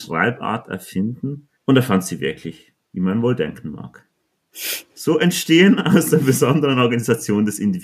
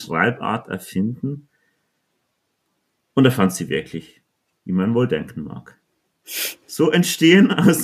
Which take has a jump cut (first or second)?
first